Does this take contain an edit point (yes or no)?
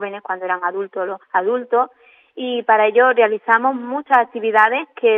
yes